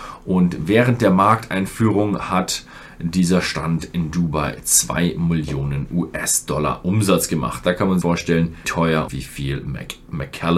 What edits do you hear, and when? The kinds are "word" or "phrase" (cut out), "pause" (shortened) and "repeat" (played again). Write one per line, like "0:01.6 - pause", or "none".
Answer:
0:08.0 - word
0:08.6 - word
0:09.1 - word

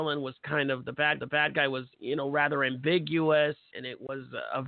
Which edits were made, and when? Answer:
0:01.2 - repeat
0:01.9 - pause
0:03.7 - word

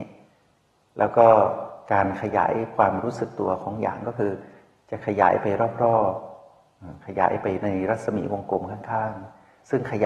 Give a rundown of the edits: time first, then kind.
none

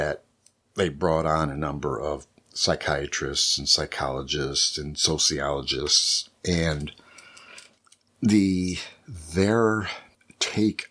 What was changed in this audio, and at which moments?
0:06.4 - pause

